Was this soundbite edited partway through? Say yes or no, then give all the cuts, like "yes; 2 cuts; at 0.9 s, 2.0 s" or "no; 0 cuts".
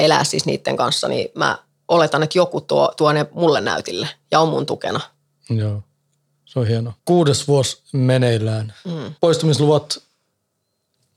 yes; 1 cut; at 7.0 s